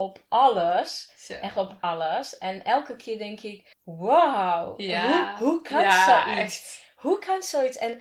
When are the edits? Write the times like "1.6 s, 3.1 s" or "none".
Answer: 3.7 s